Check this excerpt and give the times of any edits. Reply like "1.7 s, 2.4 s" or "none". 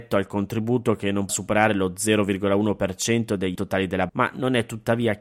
1.3 s, 3.5 s, 4.1 s